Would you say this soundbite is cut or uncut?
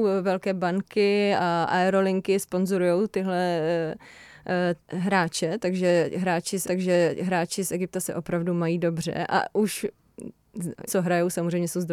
cut